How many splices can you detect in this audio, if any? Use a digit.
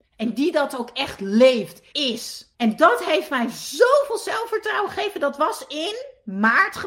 2